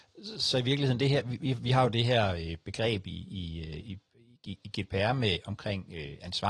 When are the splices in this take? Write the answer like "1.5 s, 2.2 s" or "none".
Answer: none

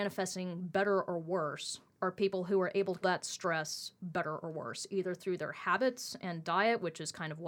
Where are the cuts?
3.0 s

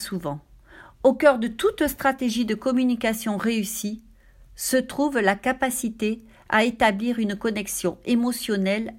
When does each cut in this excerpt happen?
none

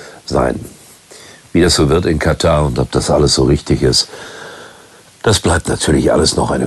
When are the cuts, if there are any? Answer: none

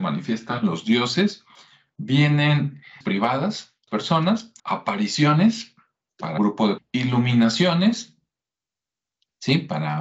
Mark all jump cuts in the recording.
3.0 s, 3.9 s, 4.6 s, 6.4 s, 6.8 s

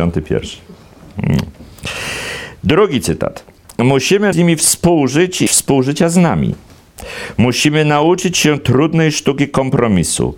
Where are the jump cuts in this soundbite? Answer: 4.3 s, 5.5 s

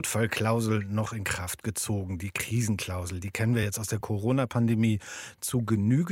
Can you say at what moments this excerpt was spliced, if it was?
none

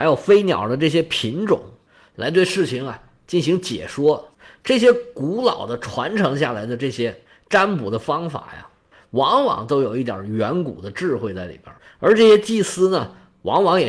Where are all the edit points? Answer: none

